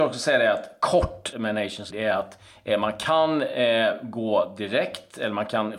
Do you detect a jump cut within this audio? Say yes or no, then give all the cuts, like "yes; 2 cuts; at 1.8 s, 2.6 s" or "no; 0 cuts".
yes; 2 cuts; at 1.3 s, 1.9 s